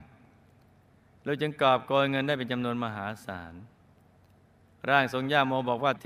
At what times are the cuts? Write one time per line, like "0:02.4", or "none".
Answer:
none